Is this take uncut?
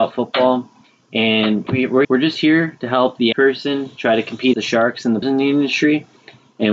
no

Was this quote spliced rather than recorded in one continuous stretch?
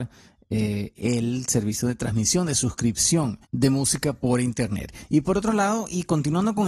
yes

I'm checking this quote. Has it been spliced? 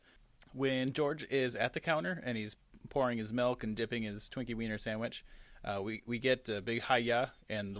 no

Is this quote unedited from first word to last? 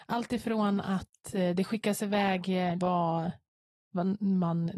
no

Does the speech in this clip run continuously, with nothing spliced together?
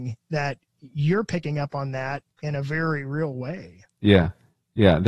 no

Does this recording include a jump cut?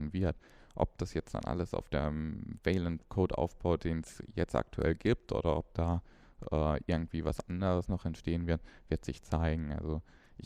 no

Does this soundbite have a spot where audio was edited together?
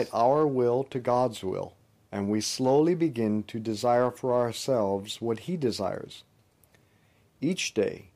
no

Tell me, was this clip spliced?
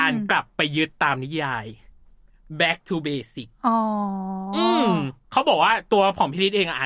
yes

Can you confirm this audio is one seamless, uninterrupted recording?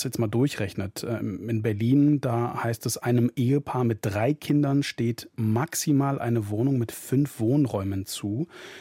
yes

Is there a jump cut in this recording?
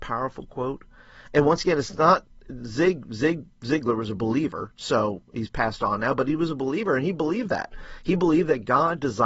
no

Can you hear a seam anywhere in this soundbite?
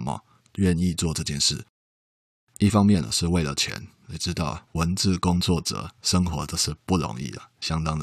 no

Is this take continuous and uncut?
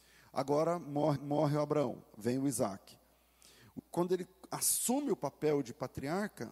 no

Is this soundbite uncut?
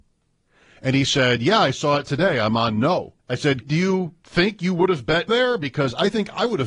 no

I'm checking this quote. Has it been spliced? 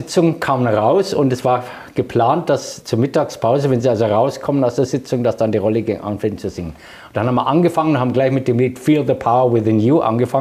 no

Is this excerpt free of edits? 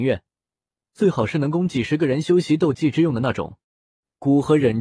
no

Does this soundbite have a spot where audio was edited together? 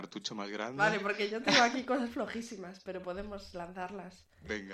no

